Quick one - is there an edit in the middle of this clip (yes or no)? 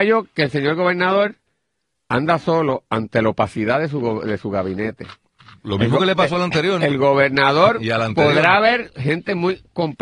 no